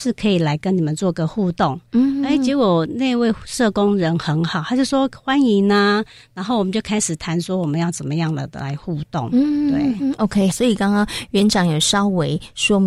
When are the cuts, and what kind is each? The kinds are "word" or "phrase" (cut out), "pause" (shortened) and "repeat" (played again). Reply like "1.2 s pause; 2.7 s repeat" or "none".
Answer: 10.5 s word